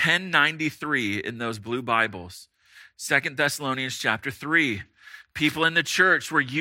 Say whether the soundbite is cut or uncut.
uncut